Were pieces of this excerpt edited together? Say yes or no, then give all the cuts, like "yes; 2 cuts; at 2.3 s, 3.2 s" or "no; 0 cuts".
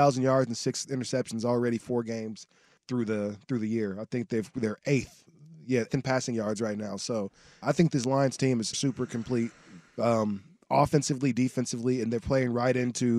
yes; 4 cuts; at 2.8 s, 5.9 s, 7.6 s, 8.7 s